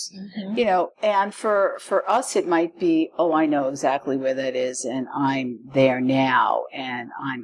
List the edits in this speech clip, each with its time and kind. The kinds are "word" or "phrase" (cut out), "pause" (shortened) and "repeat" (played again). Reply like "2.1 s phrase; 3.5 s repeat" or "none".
0.9 s pause